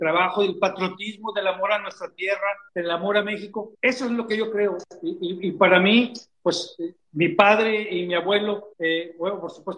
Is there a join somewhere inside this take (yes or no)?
yes